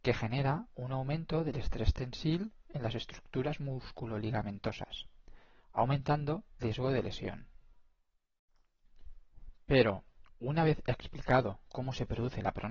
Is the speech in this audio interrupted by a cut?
yes; 1 cut; at 6.6 s

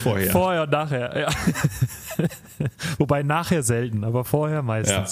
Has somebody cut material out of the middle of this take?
no; 0 cuts

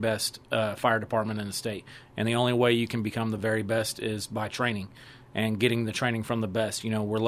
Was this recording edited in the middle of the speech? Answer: no; 0 cuts

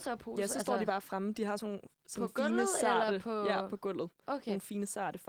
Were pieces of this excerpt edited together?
no; 0 cuts

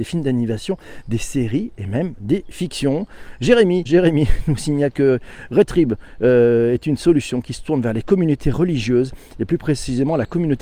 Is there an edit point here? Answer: yes; 1 cut; at 3.9 s

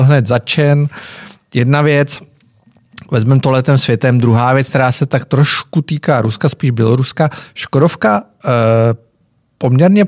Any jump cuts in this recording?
no; 0 cuts

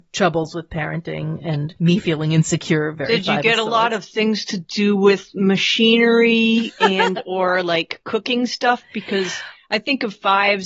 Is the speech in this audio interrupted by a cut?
no; 0 cuts

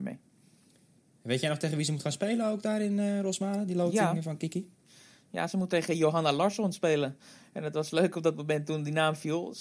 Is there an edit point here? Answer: no; 0 cuts

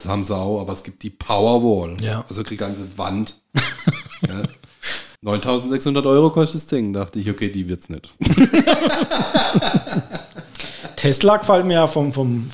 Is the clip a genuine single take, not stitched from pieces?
no; 2 cuts; at 2.6 s, 5.1 s

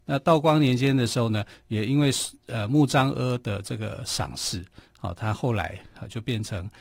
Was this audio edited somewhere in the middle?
no; 0 cuts

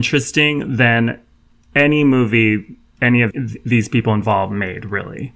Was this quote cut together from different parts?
yes; 1 cut; at 3.3 s

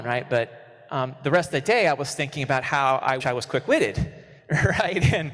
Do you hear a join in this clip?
yes; 2 cuts; at 3.2 s, 4.4 s

